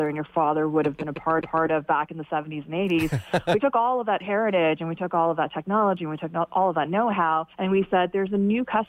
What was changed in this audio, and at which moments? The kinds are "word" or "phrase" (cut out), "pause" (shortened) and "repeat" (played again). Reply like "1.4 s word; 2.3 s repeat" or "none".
1.4 s repeat; 3.6 s phrase; 7.5 s pause

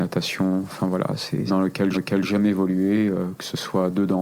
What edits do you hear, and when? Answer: 1.5 s phrase; 1.9 s repeat

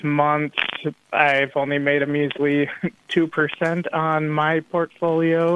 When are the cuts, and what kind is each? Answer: none

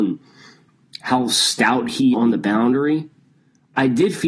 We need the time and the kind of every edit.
2.1 s word

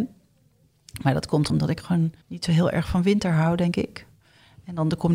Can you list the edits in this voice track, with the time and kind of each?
1.5 s word; 2.2 s pause

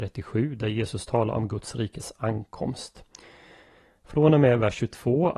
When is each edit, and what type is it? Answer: none

